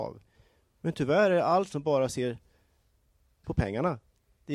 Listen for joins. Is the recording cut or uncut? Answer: cut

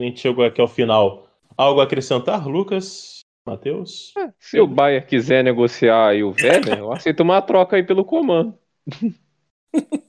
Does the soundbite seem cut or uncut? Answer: uncut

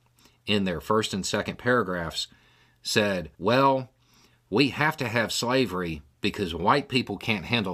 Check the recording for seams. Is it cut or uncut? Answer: cut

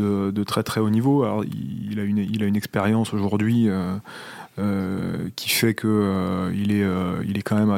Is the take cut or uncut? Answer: uncut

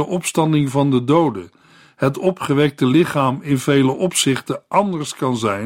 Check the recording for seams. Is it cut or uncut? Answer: uncut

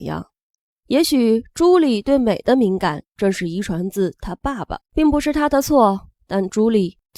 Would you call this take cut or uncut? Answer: cut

